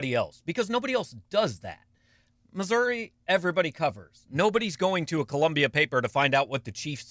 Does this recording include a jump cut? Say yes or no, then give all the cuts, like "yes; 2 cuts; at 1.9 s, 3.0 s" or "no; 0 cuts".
no; 0 cuts